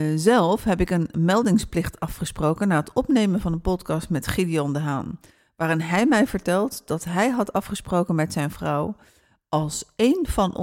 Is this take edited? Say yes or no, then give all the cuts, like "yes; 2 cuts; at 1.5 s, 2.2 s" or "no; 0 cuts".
no; 0 cuts